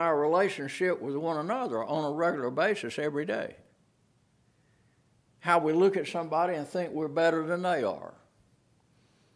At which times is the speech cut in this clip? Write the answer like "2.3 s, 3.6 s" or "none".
none